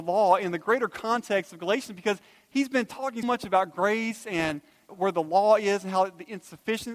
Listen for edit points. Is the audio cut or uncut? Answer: cut